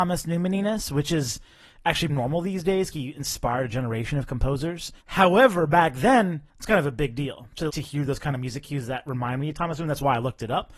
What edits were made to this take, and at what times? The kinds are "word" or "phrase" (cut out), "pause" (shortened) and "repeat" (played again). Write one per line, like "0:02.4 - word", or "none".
0:02.1 - word
0:02.9 - phrase
0:05.0 - pause
0:06.5 - pause
0:07.7 - word